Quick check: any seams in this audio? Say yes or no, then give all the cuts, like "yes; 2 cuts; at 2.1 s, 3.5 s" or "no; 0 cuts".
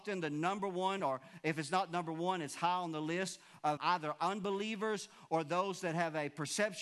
yes; 2 cuts; at 1.0 s, 3.8 s